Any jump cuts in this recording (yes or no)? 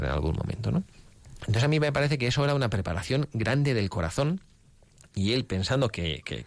no